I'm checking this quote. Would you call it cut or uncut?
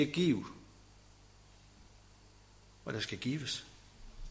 uncut